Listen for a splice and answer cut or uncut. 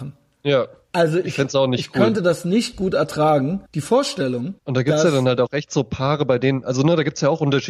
cut